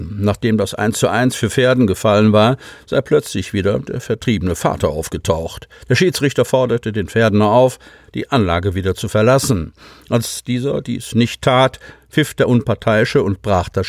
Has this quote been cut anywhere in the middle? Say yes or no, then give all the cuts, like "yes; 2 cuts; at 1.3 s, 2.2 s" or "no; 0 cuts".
no; 0 cuts